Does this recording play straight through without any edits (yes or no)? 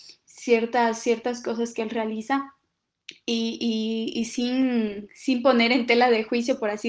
yes